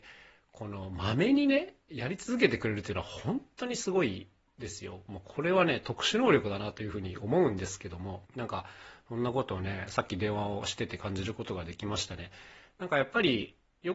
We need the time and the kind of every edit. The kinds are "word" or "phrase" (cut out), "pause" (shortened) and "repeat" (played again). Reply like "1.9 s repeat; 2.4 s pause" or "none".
8.3 s pause